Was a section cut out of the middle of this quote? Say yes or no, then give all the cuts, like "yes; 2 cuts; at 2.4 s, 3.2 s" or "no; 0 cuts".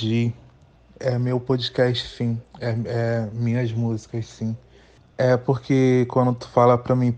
yes; 1 cut; at 2.5 s